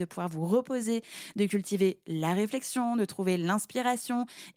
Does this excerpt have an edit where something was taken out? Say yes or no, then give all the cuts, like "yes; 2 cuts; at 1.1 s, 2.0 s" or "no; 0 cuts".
no; 0 cuts